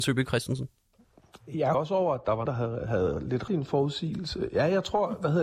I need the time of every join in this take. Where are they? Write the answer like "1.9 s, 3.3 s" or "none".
1.7 s, 2.5 s, 3.5 s